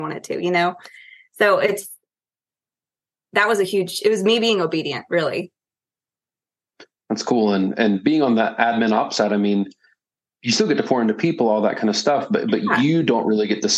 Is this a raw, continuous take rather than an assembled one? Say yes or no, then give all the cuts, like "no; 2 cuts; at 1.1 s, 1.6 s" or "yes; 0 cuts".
yes; 0 cuts